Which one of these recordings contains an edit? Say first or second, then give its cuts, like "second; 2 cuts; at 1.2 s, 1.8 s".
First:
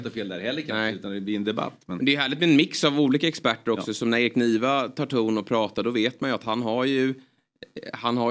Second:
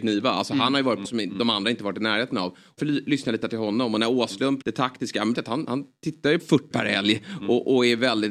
second; 7 cuts; at 1.0 s, 2.8 s, 3.4 s, 4.6 s, 5.3 s, 6.4 s, 6.7 s